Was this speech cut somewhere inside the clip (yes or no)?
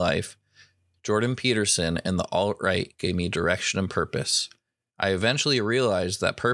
no